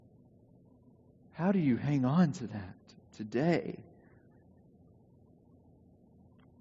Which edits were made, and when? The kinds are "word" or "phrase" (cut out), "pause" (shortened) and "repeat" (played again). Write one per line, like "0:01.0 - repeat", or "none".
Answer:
none